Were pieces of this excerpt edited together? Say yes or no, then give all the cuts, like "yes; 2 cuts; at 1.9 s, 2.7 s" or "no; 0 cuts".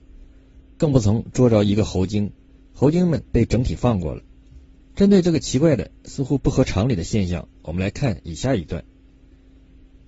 yes; 3 cuts; at 2.5 s, 3.3 s, 4.8 s